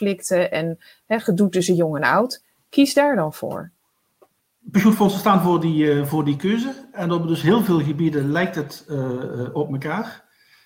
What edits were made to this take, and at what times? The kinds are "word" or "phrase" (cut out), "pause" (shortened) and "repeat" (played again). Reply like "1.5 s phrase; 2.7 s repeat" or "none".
none